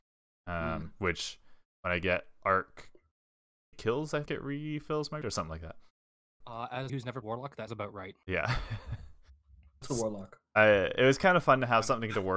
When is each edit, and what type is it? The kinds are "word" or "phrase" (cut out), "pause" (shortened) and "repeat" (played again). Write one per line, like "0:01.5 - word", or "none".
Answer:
0:03.7 - word
0:04.3 - word
0:05.2 - word
0:06.4 - word
0:06.9 - word
0:07.2 - word
0:07.7 - word
0:09.8 - word

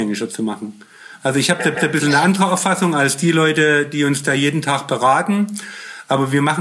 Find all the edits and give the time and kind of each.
0:01.7 - repeat

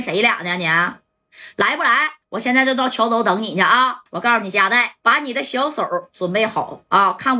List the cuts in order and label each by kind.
0:02.2 - pause
0:04.1 - pause
0:05.0 - pause

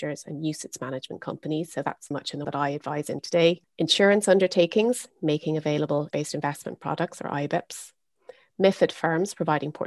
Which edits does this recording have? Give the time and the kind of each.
0:02.1 - word
0:02.4 - word
0:03.2 - word
0:06.1 - word

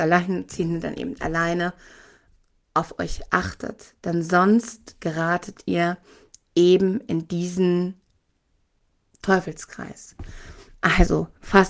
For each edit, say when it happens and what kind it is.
none

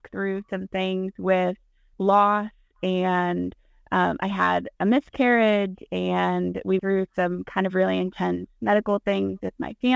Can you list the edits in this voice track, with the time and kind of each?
0:01.9 - word
0:06.8 - word

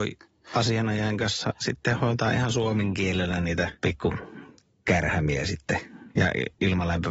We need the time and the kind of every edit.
0:03.8 - pause

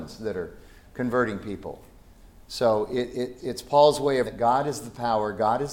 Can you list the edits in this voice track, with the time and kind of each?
0:03.4 - word
0:04.2 - phrase

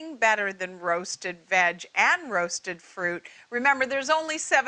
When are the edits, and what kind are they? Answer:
none

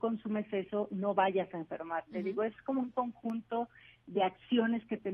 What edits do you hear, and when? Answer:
none

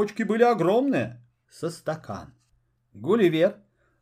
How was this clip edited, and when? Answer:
0:01.4 - word

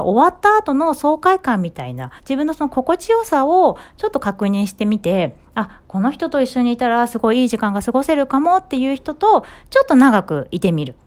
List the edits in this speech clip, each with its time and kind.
0:02.2 - pause

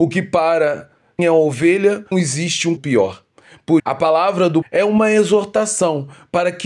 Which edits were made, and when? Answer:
0:01.2 - word
0:02.1 - word
0:02.8 - word
0:03.8 - word
0:04.6 - word

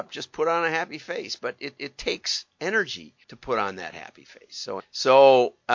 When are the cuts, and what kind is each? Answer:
0:01.8 - repeat
0:03.2 - pause
0:04.8 - word

